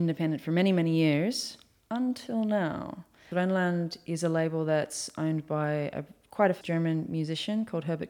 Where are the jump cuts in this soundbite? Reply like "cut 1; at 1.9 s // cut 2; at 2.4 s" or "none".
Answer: cut 1; at 6.6 s